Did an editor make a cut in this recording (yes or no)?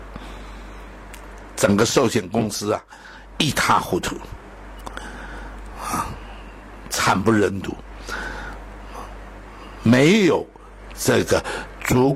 no